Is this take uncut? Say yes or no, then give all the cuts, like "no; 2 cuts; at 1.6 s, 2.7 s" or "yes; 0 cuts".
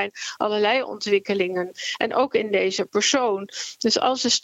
yes; 0 cuts